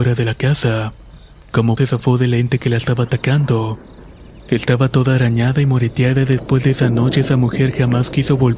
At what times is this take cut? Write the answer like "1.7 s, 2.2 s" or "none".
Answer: 1.8 s

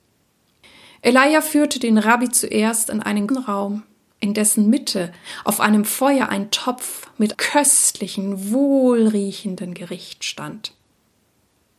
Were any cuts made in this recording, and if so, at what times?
3.3 s, 7.3 s

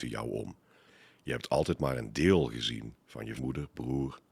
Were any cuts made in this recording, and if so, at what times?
3.4 s

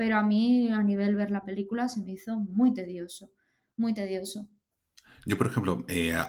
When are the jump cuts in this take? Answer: none

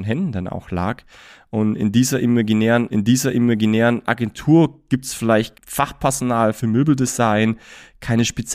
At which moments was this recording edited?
2.9 s, 5.5 s

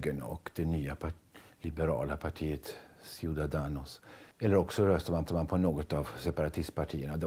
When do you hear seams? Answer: 4.3 s, 5.3 s

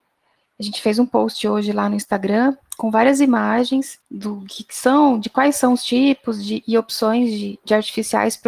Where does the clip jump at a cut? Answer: 4.0 s

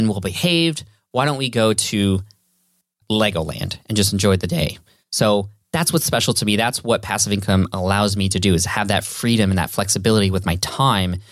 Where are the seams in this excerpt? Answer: 3.0 s

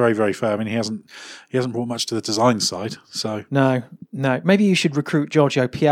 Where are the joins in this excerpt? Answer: 4.1 s

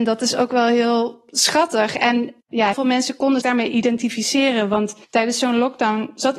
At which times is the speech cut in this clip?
2.7 s, 3.4 s, 5.0 s

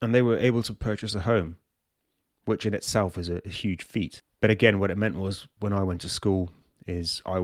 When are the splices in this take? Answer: none

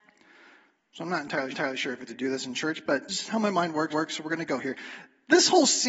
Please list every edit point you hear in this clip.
1.5 s, 2.1 s, 3.1 s, 3.9 s

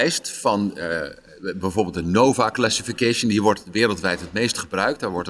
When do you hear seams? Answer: none

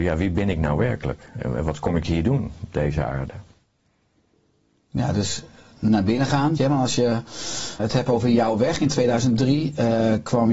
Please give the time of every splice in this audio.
6.6 s, 7.8 s

